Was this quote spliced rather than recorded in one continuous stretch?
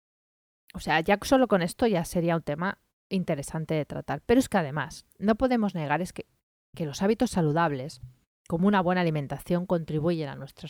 no; 0 cuts

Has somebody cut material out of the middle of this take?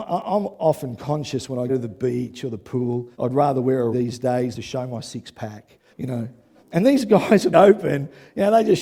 yes; 7 cuts; at 1.7 s, 3.1 s, 3.9 s, 4.5 s, 5.9 s, 6.6 s, 7.5 s

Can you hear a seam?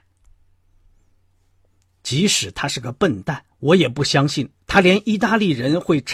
yes; 1 cut; at 3.5 s

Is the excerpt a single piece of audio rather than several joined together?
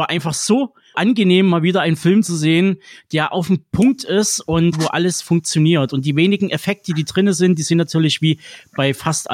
no; 2 cuts; at 0.9 s, 4.7 s

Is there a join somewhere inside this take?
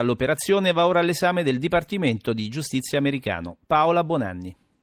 no; 0 cuts

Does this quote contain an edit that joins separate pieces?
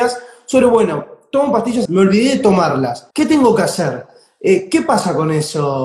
yes; 2 cuts; at 1.9 s, 3.1 s

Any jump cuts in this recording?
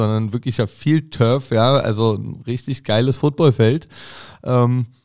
no; 0 cuts

